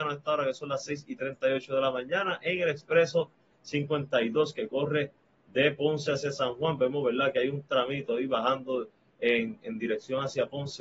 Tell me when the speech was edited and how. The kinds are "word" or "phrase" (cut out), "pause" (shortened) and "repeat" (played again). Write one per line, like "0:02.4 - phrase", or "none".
none